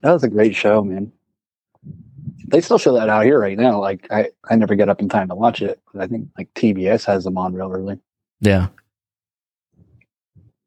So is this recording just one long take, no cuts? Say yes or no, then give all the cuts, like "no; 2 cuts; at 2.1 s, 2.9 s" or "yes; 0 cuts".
yes; 0 cuts